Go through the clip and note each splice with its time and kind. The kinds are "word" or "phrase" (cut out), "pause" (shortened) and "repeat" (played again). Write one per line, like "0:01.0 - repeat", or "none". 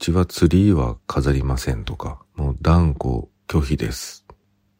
0:02.3 - pause
0:03.3 - pause